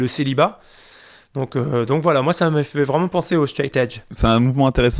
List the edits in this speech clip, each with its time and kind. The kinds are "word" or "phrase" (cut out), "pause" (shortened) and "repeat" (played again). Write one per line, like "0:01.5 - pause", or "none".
none

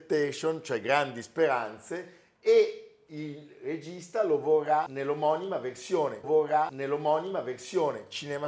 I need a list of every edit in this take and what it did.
0:06.2 - repeat

